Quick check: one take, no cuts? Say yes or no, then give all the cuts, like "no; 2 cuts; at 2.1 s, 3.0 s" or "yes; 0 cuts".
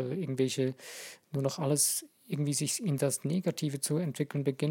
yes; 0 cuts